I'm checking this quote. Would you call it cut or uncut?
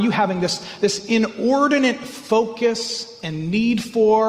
uncut